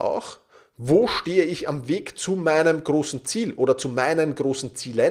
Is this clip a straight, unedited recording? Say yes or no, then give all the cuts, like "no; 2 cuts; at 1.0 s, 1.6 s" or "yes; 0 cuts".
yes; 0 cuts